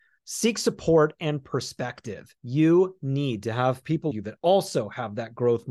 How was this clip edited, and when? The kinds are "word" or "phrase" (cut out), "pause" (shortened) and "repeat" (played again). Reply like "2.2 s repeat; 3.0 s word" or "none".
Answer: 2.4 s pause; 4.1 s word